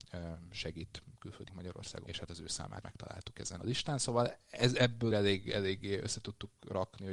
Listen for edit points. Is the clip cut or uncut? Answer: cut